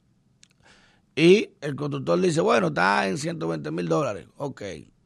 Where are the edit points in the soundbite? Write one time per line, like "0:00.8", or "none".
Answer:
0:01.6